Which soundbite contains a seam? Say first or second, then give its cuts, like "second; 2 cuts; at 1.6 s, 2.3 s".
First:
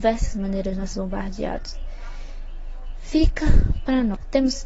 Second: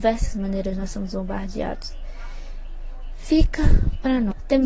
first; 1 cut; at 0.9 s